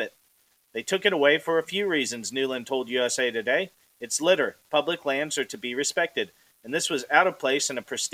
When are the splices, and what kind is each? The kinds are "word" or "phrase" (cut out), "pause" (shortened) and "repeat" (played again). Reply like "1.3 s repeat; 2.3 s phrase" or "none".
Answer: none